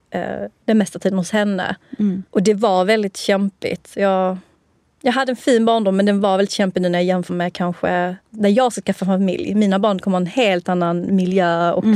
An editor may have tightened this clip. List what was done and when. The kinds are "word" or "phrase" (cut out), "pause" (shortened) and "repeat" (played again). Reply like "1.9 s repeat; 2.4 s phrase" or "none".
2.3 s pause; 4.6 s pause; 7.3 s word; 8.2 s pause